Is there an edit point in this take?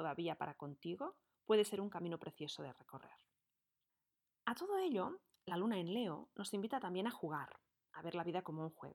no; 0 cuts

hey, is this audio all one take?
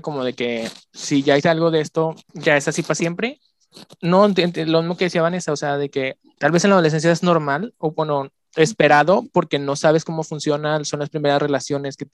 no; 3 cuts; at 1.4 s, 2.2 s, 3.9 s

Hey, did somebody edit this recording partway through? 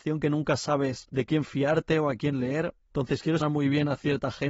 yes; 1 cut; at 3.4 s

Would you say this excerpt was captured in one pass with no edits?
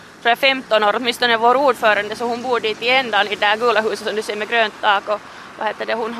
yes; 0 cuts

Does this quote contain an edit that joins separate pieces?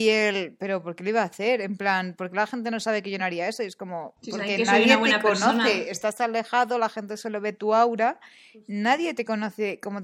no; 0 cuts

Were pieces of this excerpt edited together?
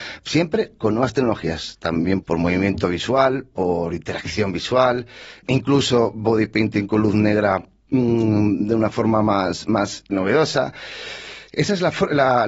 yes; 3 cuts; at 2.2 s, 5.4 s, 10.1 s

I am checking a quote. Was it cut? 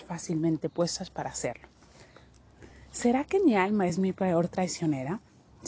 no; 0 cuts

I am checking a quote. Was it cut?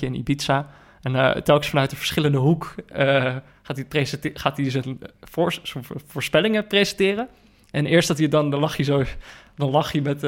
no; 0 cuts

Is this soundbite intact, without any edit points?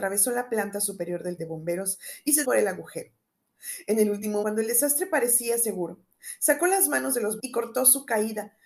no; 4 cuts; at 1.4 s, 2.4 s, 4.4 s, 7.4 s

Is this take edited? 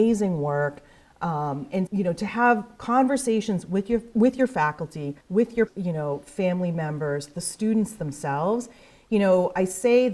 yes; 3 cuts; at 1.9 s, 5.2 s, 5.7 s

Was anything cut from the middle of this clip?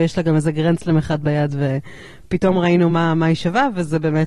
no; 0 cuts

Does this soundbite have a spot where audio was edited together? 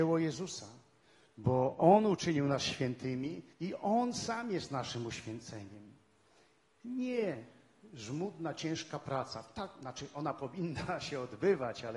yes; 1 cut; at 3.5 s

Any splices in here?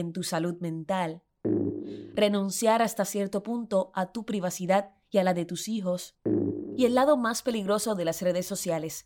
no; 0 cuts

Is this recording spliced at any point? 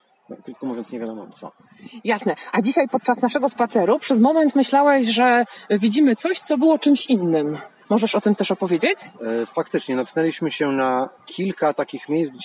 yes; 2 cuts; at 7.8 s, 11.1 s

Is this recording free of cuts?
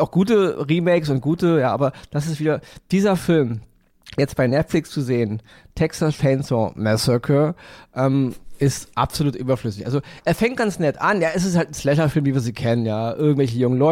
yes; 0 cuts

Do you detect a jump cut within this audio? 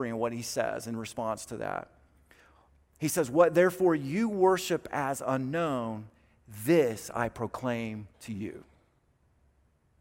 yes; 1 cut; at 8.1 s

